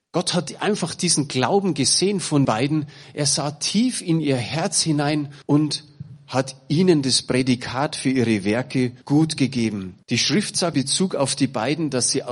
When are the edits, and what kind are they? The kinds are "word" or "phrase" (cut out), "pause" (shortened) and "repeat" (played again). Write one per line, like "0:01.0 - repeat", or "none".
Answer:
0:02.4 - word
0:05.4 - pause
0:09.0 - pause
0:10.0 - pause
0:10.7 - word